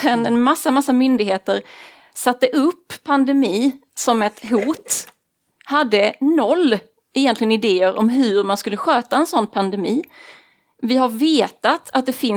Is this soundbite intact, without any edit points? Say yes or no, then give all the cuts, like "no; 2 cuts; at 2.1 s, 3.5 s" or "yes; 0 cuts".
yes; 0 cuts